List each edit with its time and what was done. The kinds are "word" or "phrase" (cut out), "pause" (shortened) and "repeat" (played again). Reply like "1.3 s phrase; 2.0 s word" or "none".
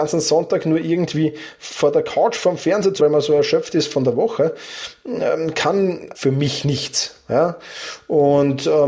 3.0 s word; 6.1 s word

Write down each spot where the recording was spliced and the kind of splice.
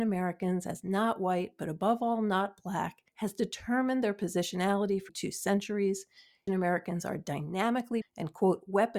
3.1 s pause; 5.1 s word; 6.5 s word; 8.0 s word

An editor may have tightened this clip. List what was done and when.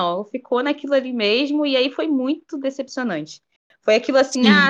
none

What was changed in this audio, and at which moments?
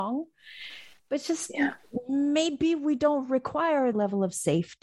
3.9 s word

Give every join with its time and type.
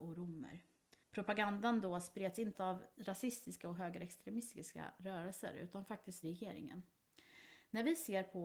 1.0 s pause; 2.5 s word; 2.9 s word; 6.2 s phrase

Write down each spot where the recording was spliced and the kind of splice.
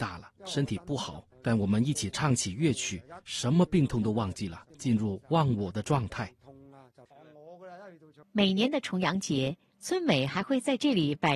1.3 s pause; 4.7 s pause; 8.2 s pause

